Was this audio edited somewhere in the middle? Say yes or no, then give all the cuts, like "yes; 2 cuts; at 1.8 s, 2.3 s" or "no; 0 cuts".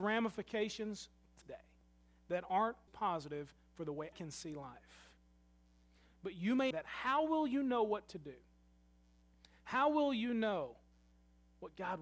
yes; 4 cuts; at 1.4 s, 2.9 s, 4.1 s, 6.7 s